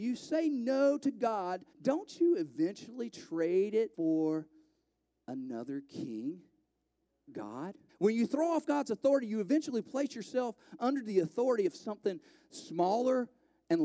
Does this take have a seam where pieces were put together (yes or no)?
yes